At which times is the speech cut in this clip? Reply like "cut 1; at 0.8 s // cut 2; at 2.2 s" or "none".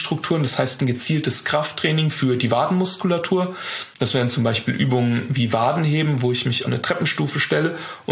cut 1; at 6.6 s